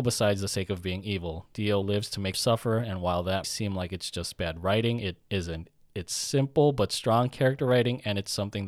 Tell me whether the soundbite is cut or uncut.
cut